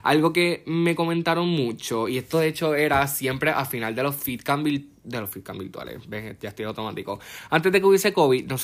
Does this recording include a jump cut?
no; 0 cuts

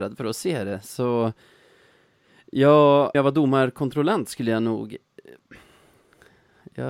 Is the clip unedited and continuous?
no; 1 cut; at 3.1 s

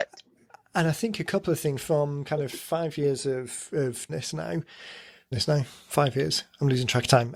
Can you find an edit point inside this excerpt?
yes; 3 cuts; at 1.8 s, 4.1 s, 5.3 s

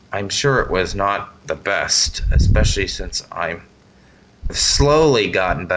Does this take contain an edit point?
yes; 1 cut; at 4.5 s

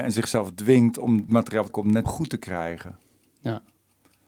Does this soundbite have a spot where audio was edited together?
yes; 3 cuts; at 1.3 s, 1.7 s, 2.0 s

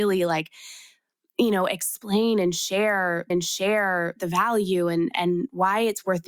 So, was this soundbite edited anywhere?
yes; 1 cut; at 3.3 s

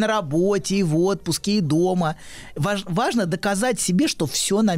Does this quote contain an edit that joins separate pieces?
no; 0 cuts

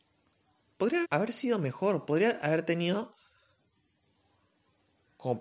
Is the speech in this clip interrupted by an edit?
yes; 1 cut; at 1.0 s

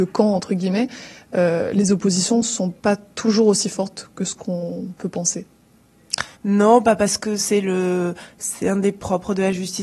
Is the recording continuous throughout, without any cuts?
no; 2 cuts; at 2.8 s, 6.3 s

